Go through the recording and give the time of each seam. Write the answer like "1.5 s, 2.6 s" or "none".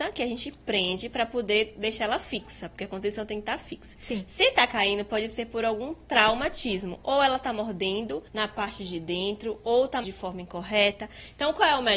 8.3 s, 10.0 s